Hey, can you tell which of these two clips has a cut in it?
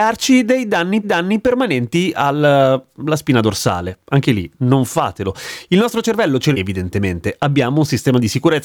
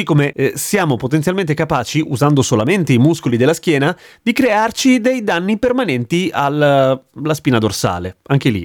first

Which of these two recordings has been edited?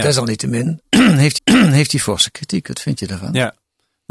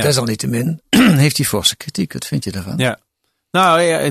first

